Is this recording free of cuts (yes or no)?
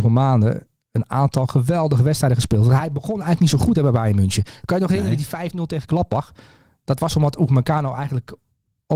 yes